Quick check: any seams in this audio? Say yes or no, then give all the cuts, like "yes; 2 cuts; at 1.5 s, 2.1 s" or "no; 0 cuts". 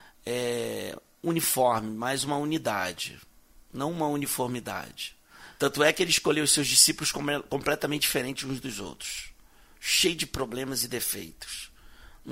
no; 0 cuts